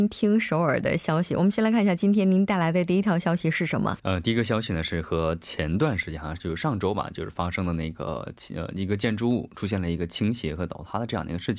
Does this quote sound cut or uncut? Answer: cut